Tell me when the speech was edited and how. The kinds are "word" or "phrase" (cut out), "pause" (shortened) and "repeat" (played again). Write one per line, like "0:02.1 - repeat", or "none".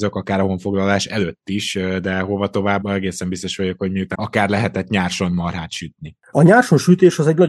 0:02.8 - word
0:04.1 - word